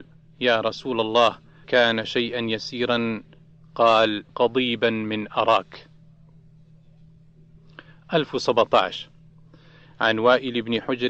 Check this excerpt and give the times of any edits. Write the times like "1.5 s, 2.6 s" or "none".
1.6 s, 4.3 s